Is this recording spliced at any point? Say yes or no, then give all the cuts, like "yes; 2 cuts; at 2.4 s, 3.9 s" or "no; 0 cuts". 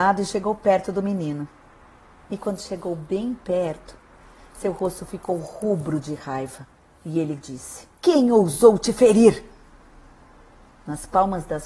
yes; 1 cut; at 7.9 s